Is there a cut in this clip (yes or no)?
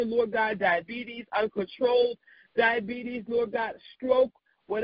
no